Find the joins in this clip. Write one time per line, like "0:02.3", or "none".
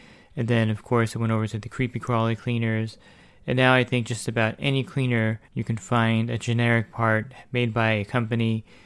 0:05.4